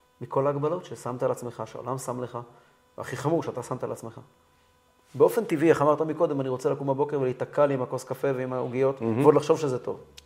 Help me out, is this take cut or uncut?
uncut